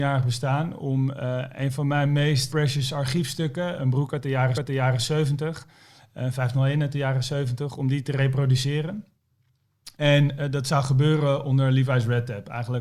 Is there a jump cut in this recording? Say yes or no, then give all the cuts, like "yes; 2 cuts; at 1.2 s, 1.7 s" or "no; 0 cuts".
yes; 4 cuts; at 2.5 s, 3.8 s, 4.5 s, 9.9 s